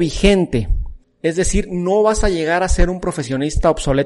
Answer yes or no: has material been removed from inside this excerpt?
yes